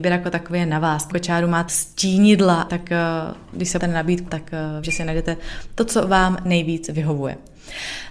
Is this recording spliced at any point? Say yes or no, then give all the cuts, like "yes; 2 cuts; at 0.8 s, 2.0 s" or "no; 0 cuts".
yes; 6 cuts; at 1.1 s, 1.7 s, 2.7 s, 3.8 s, 4.3 s, 4.8 s